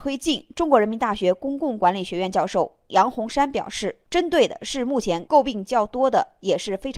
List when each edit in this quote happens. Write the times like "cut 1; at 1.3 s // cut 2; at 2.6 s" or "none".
cut 1; at 4.0 s